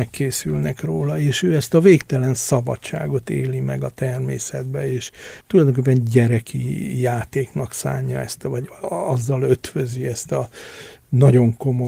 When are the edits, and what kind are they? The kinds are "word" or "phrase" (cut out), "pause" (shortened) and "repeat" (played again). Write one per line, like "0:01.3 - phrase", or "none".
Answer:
0:05.4 - pause